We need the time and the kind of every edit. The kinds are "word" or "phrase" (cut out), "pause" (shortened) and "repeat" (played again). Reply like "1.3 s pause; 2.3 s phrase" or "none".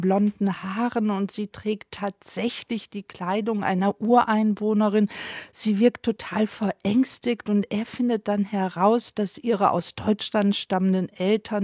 none